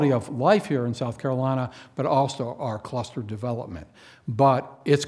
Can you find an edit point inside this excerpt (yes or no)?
no